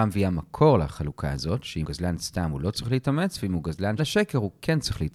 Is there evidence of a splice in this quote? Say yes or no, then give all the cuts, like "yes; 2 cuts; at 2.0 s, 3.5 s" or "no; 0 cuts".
yes; 2 cuts; at 1.8 s, 4.0 s